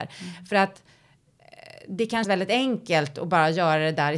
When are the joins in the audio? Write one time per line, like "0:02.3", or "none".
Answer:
0:02.2